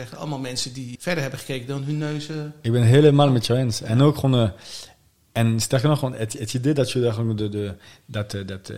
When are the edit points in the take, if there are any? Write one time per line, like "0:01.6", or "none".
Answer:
0:01.0